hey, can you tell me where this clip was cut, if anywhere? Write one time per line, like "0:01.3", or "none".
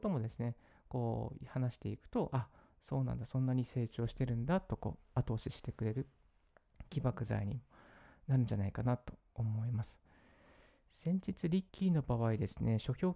0:11.7